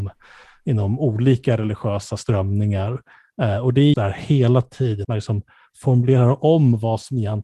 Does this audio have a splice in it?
yes; 2 cuts; at 3.9 s, 5.0 s

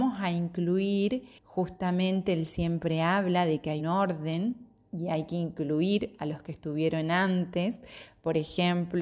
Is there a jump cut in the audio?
yes; 2 cuts; at 1.4 s, 3.8 s

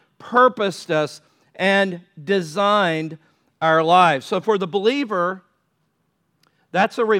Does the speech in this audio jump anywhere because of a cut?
no; 0 cuts

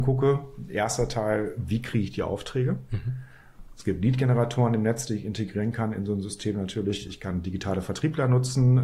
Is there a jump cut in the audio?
no; 0 cuts

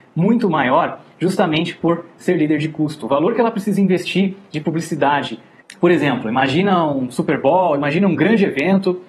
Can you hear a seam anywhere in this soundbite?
no; 0 cuts

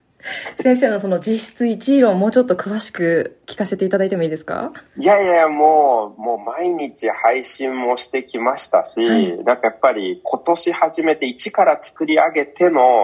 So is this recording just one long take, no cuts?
no; 1 cut; at 4.9 s

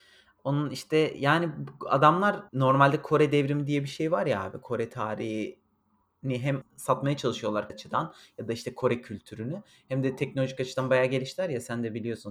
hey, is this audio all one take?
no; 3 cuts; at 2.5 s, 6.6 s, 7.7 s

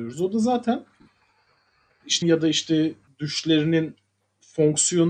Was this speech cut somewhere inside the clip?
yes; 2 cuts; at 2.2 s, 3.1 s

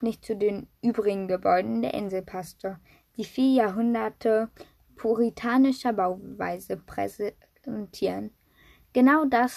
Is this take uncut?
yes; 0 cuts

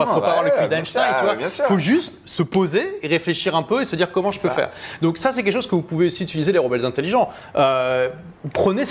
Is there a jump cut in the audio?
no; 0 cuts

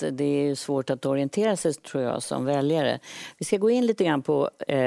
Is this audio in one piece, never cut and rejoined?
yes; 0 cuts

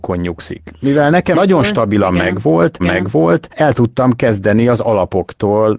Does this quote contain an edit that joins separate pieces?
yes; 2 cuts; at 1.3 s, 2.8 s

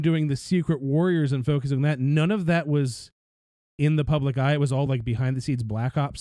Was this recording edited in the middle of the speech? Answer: no; 0 cuts

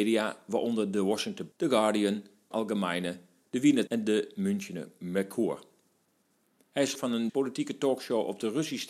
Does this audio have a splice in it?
yes; 5 cuts; at 1.5 s, 2.5 s, 3.9 s, 6.9 s, 7.3 s

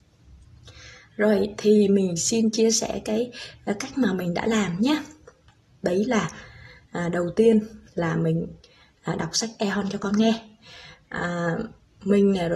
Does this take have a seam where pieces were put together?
no; 0 cuts

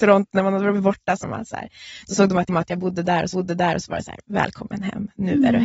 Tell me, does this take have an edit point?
yes; 3 cuts; at 1.2 s, 2.5 s, 3.3 s

